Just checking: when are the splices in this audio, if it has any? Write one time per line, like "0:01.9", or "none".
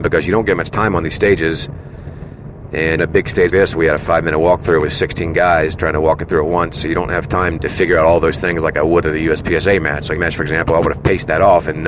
0:03.0
0:03.5
0:07.6
0:10.2